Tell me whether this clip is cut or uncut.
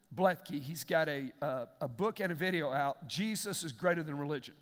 uncut